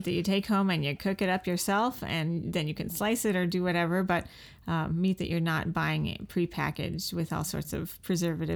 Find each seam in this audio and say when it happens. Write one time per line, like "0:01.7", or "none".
none